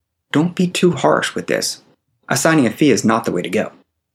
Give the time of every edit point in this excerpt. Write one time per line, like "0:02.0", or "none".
none